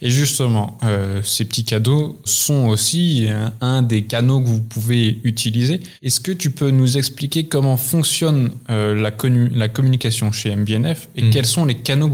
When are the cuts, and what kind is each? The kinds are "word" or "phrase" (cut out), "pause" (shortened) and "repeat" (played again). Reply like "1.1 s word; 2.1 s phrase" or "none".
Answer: 2.3 s word; 6.0 s pause